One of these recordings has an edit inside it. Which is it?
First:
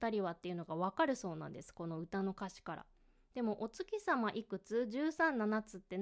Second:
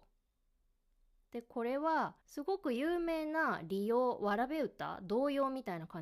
second; 1 cut; at 2.2 s

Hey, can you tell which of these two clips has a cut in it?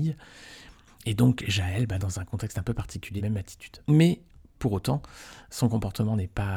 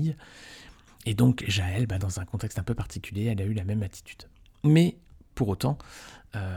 first; 3 cuts; at 3.2 s, 3.8 s, 5.5 s

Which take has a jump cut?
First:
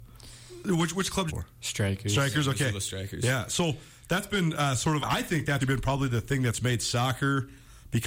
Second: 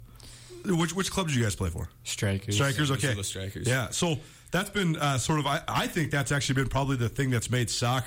first; 3 cuts; at 1.3 s, 5.0 s, 5.6 s

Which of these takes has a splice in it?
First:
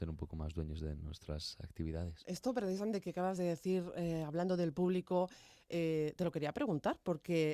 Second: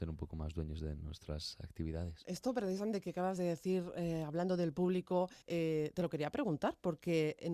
second; 1 cut; at 5.4 s

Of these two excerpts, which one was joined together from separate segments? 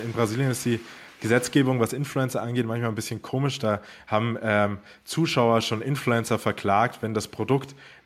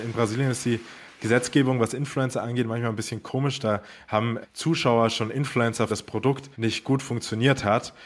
second; 3 cuts; at 4.4 s, 5.9 s, 6.5 s

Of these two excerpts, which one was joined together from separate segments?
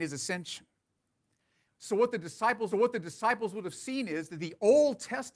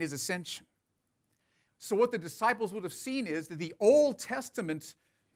first; 1 cut; at 2.7 s

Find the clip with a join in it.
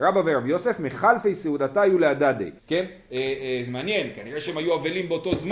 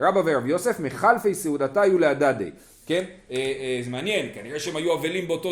first; 1 cut; at 2.6 s

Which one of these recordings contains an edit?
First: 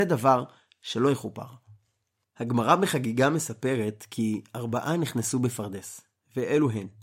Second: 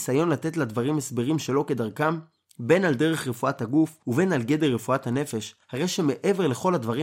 second; 2 cuts; at 4.0 s, 5.6 s

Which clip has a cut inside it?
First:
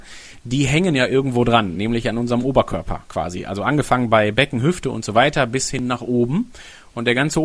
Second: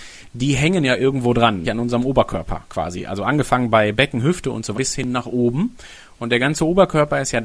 second; 2 cuts; at 1.6 s, 4.7 s

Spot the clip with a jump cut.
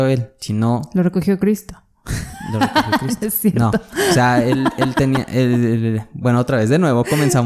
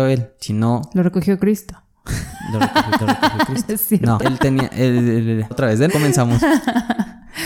second; 4 cuts; at 3.0 s, 4.2 s, 5.5 s, 5.9 s

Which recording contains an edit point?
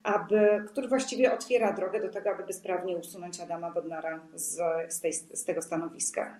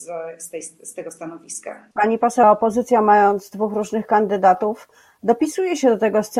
second; 2 cuts; at 1.9 s, 2.4 s

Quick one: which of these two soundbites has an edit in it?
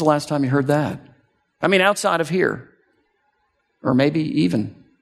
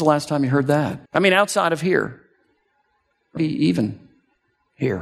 second; 2 cuts; at 1.1 s, 3.4 s

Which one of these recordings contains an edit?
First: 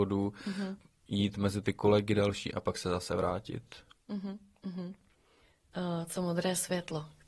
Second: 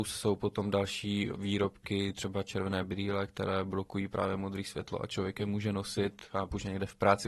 second; 2 cuts; at 1.3 s, 6.3 s

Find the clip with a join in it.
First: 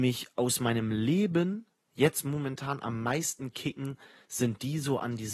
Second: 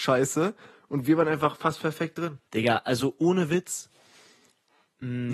second; 1 cut; at 2.5 s

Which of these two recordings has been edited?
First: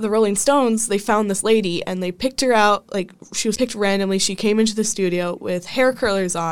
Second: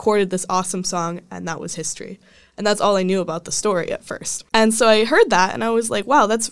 second; 1 cut; at 4.5 s

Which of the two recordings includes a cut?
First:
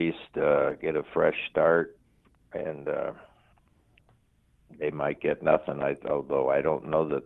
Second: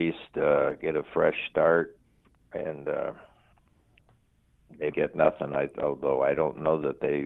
second; 1 cut; at 4.9 s

